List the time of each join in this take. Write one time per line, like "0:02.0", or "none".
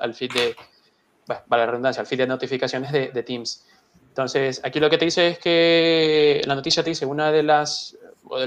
none